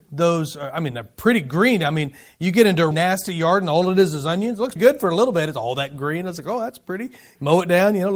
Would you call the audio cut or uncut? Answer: cut